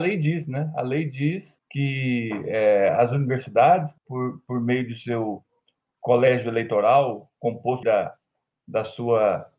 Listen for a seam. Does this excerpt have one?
yes; 3 cuts; at 1.6 s, 4.0 s, 7.8 s

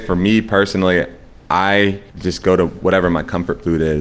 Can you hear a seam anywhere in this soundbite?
yes; 1 cut; at 2.1 s

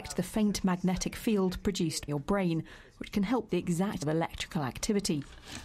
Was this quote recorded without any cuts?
no; 3 cuts; at 2.1 s, 3.5 s, 4.0 s

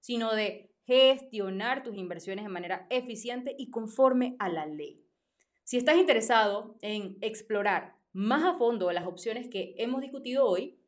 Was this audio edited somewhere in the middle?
no; 0 cuts

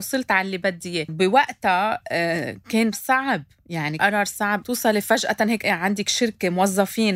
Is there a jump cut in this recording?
yes; 5 cuts; at 1.1 s, 2.9 s, 4.0 s, 4.6 s, 5.6 s

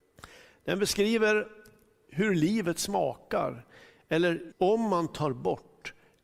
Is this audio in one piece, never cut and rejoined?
no; 1 cut; at 4.5 s

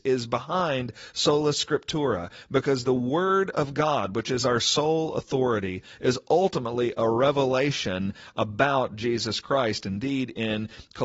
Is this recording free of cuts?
yes; 0 cuts

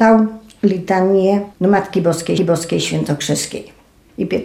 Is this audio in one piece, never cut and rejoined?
no; 2 cuts; at 1.5 s, 2.4 s

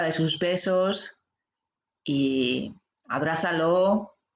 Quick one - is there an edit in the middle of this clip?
no; 0 cuts

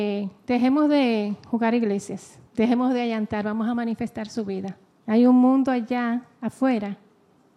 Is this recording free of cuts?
no; 2 cuts; at 2.5 s, 4.9 s

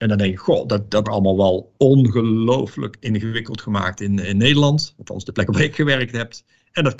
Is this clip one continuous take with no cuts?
no; 1 cut; at 1.0 s

